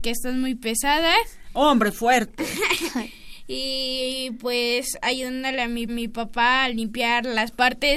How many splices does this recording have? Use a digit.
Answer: 1